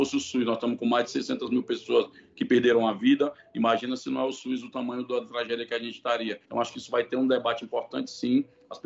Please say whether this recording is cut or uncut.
cut